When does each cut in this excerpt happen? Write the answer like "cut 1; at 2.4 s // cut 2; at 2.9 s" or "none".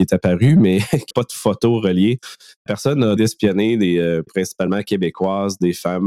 cut 1; at 1.1 s // cut 2; at 2.7 s // cut 3; at 3.2 s // cut 4; at 4.3 s